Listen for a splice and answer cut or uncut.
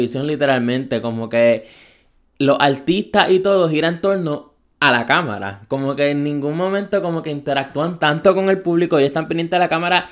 uncut